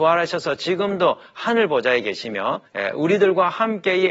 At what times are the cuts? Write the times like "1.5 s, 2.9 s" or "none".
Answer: 2.7 s